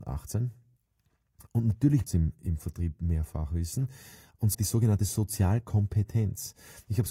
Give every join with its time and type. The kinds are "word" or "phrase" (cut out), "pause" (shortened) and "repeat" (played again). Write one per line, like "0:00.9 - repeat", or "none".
0:02.1 - word
0:04.5 - word